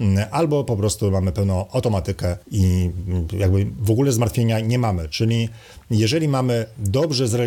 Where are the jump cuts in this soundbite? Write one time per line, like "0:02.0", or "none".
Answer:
0:02.4